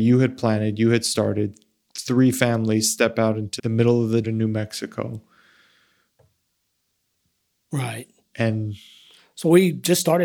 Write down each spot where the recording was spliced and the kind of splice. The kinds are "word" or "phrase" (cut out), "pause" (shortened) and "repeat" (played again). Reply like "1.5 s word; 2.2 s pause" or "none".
3.6 s word; 4.2 s word